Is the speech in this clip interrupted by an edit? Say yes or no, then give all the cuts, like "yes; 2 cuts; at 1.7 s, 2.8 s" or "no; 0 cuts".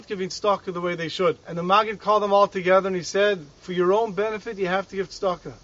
yes; 2 cuts; at 1.4 s, 3.6 s